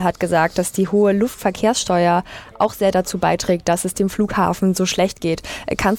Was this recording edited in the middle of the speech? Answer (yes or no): no